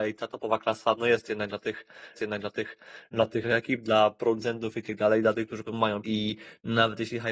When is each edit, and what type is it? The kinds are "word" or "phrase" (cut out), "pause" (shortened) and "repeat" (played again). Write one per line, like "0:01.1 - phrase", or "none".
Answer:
0:02.1 - repeat
0:03.4 - word
0:05.7 - word
0:06.0 - word